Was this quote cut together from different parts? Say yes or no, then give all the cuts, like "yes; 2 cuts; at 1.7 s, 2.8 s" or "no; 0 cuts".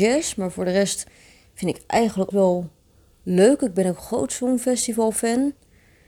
yes; 1 cut; at 2.3 s